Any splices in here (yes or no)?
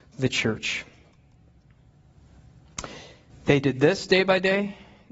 yes